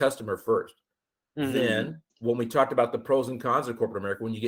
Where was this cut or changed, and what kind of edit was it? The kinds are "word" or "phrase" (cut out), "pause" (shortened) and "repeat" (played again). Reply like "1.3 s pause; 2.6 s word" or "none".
2.1 s pause